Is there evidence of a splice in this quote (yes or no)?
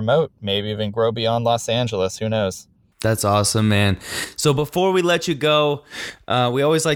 no